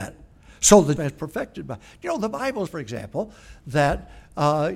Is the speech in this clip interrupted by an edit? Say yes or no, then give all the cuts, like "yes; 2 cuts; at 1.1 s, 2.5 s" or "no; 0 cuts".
yes; 2 cuts; at 1.0 s, 2.7 s